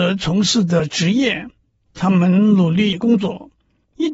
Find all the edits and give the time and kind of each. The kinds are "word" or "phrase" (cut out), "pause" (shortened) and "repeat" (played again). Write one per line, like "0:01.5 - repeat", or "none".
none

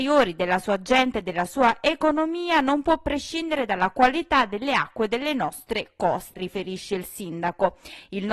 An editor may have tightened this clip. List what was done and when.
0:06.3 - word

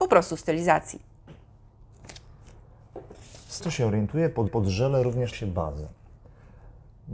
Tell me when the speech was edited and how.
0:03.6 - word
0:04.5 - repeat
0:05.3 - word

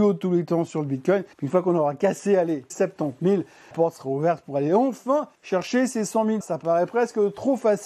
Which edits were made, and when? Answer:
0:01.3 - pause
0:02.7 - word
0:03.7 - word
0:05.4 - pause
0:06.4 - word

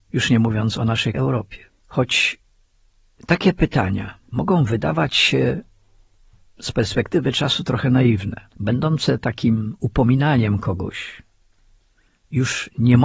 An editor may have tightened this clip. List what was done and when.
0:01.1 - word
0:01.7 - pause
0:04.2 - pause
0:08.5 - pause

